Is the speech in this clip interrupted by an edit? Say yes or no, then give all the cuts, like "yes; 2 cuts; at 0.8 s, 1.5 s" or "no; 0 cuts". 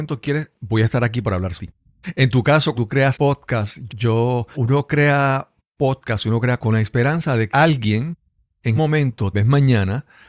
yes; 9 cuts; at 1.6 s, 2.7 s, 3.1 s, 3.9 s, 4.5 s, 6.6 s, 7.5 s, 8.8 s, 9.3 s